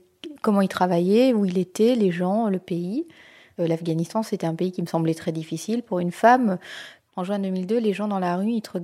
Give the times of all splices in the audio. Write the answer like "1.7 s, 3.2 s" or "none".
none